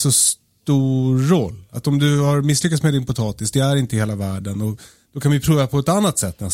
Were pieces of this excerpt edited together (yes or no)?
no